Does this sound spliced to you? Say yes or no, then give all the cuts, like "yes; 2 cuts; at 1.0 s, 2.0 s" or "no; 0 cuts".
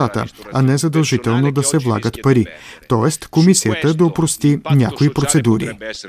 no; 0 cuts